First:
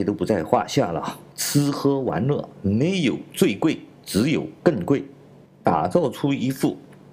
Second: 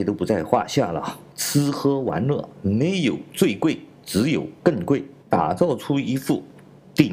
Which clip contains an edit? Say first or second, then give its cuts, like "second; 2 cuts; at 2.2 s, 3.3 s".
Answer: second; 1 cut; at 5.2 s